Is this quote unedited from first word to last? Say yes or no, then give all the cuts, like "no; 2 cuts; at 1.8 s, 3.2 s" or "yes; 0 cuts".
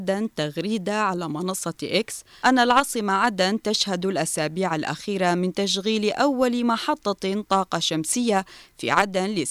yes; 0 cuts